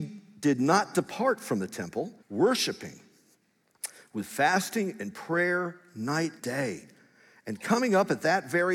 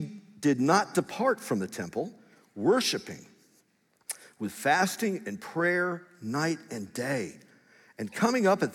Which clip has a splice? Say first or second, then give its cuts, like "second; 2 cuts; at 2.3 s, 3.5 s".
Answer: first; 2 cuts; at 2.2 s, 6.4 s